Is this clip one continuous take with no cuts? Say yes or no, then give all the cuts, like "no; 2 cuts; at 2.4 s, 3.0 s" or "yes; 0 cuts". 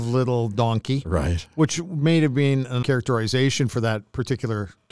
no; 1 cut; at 2.8 s